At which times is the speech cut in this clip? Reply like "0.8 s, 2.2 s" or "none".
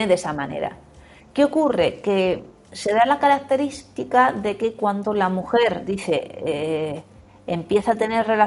none